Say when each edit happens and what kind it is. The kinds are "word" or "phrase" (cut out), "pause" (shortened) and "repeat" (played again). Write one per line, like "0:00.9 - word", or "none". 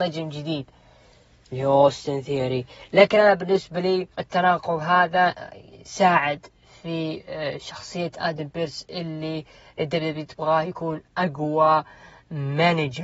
0:04.1 - pause